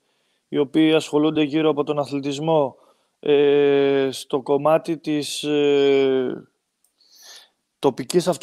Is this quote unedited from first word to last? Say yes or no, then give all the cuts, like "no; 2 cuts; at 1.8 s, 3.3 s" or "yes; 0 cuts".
yes; 0 cuts